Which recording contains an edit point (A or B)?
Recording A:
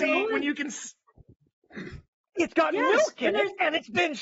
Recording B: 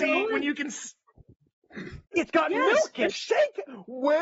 B